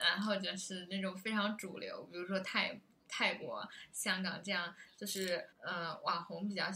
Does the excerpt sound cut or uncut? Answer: cut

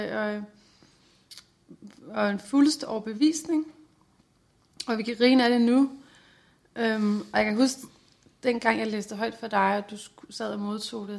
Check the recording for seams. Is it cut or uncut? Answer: uncut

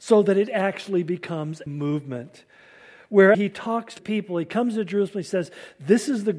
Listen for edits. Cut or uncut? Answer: cut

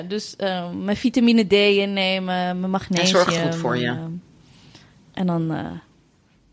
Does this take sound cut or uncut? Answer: uncut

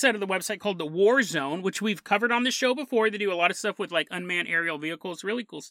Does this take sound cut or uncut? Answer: uncut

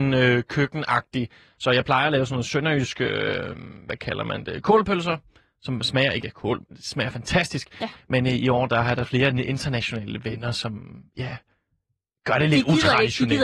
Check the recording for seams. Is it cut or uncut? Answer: uncut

